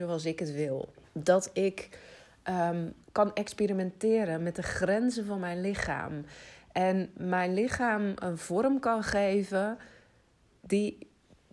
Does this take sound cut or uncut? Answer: cut